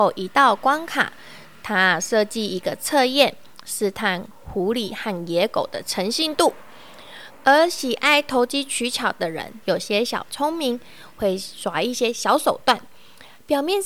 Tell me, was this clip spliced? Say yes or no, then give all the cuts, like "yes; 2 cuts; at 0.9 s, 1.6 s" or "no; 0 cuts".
yes; 2 cuts; at 7.3 s, 9.6 s